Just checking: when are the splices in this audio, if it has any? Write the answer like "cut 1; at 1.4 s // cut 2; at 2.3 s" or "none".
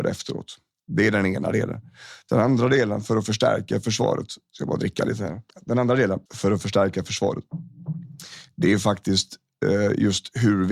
cut 1; at 5.5 s // cut 2; at 6.3 s